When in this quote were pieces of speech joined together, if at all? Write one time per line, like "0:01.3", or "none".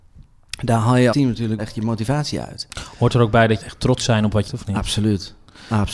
0:01.1
0:01.6
0:03.6
0:04.0
0:04.5